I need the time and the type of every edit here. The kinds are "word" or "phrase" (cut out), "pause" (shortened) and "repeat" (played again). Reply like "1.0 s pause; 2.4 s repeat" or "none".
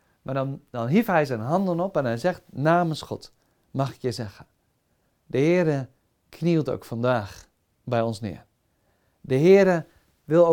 none

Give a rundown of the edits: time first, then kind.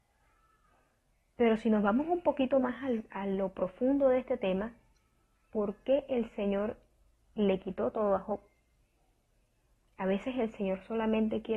none

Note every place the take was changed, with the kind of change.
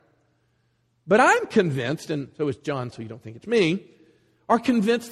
2.9 s word; 3.4 s word

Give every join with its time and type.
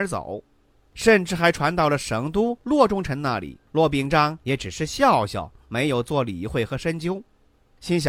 3.7 s pause

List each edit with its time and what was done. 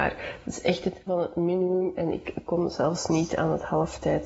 1.1 s word; 3.1 s word

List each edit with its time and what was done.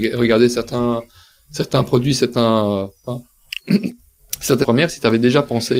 4.6 s word

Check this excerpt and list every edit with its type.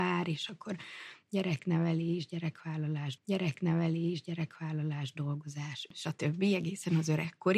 3.2 s repeat

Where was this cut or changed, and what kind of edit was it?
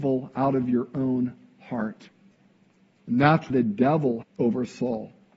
3.5 s word; 4.2 s phrase

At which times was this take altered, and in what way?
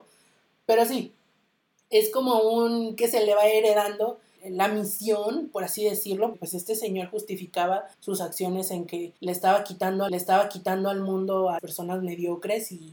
4.4 s word; 6.3 s word; 7.9 s pause; 9.2 s pause; 10.1 s repeat; 11.6 s word

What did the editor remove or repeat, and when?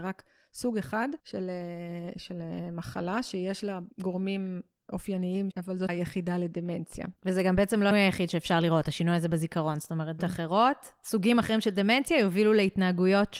1.2 s pause; 3.9 s pause; 5.5 s phrase; 5.9 s phrase; 7.2 s pause; 7.9 s word; 10.2 s word

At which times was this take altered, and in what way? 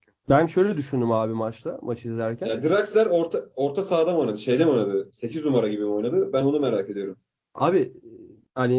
none

